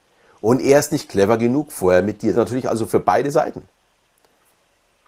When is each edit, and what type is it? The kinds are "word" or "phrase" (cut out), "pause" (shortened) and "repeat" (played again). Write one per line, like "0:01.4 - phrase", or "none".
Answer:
0:02.3 - phrase

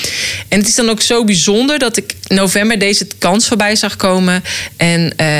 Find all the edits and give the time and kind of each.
none

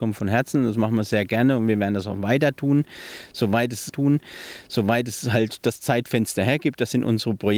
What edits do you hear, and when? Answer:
0:03.9 - repeat

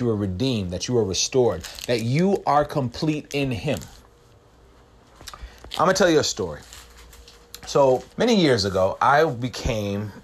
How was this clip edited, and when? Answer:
0:08.1 - pause

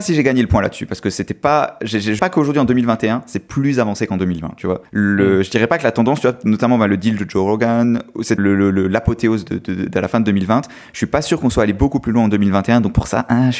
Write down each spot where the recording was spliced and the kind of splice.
0:02.2 - word
0:04.9 - pause
0:08.4 - word

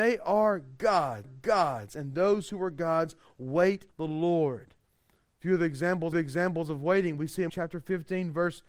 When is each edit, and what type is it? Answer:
0:01.2 - repeat
0:03.9 - word
0:06.1 - repeat
0:07.5 - word

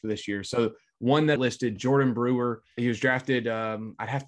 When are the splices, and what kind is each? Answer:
0:01.4 - phrase

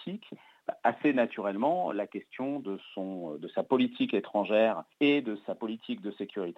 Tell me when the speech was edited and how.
0:04.9 - pause

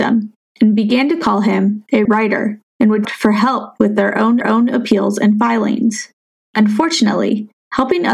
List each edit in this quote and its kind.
0:02.0 - word
0:02.7 - pause
0:03.0 - phrase
0:04.4 - repeat
0:06.3 - pause

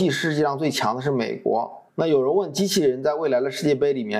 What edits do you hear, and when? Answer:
0:01.9 - pause

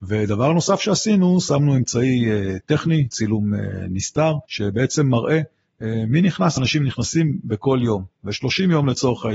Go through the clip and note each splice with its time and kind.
0:04.4 - pause
0:06.6 - phrase

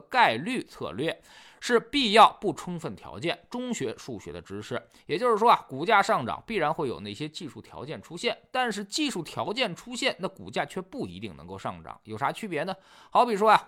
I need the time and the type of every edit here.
none

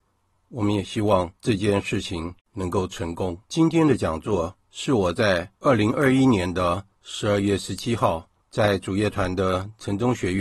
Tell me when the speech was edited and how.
0:01.4 - pause
0:02.4 - pause
0:03.4 - pause
0:04.6 - pause
0:05.6 - pause
0:08.4 - pause

